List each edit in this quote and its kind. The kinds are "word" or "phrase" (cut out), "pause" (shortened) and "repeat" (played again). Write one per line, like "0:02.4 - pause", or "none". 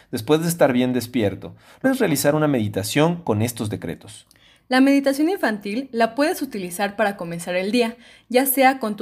0:01.8 - word